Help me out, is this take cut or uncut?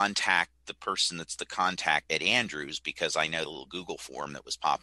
cut